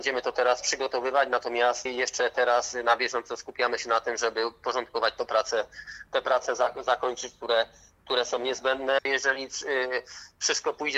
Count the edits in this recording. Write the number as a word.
one